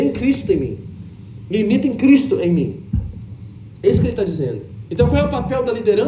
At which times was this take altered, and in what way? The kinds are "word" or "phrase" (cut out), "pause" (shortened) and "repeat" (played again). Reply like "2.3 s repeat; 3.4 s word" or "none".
none

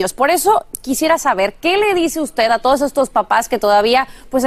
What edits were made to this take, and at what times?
none

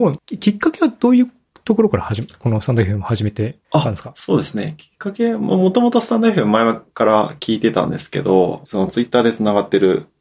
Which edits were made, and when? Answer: 3.6 s pause; 8.6 s phrase

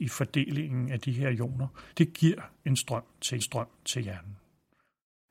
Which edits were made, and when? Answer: 1.9 s pause; 3.4 s repeat

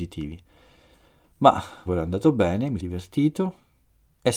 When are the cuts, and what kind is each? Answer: 1.9 s word; 2.8 s word

